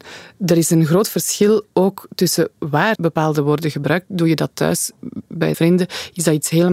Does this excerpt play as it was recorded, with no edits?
no; 2 cuts; at 3.0 s, 5.5 s

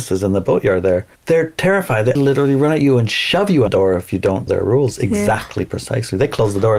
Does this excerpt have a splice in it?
yes; 4 cuts; at 1.2 s, 2.2 s, 3.7 s, 4.5 s

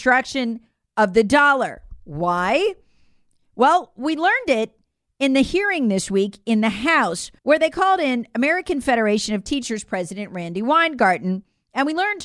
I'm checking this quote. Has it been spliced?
yes; 1 cut; at 7.4 s

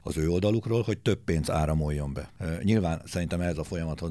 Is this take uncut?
yes; 0 cuts

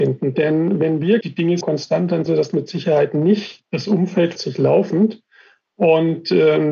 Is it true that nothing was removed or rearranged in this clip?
no; 4 cuts; at 1.2 s, 1.6 s, 2.3 s, 4.4 s

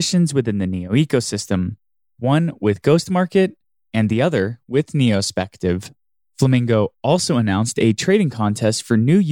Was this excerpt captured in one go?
yes; 0 cuts

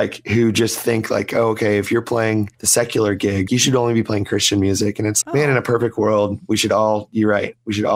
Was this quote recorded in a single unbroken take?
no; 3 cuts; at 2.5 s, 3.5 s, 5.2 s

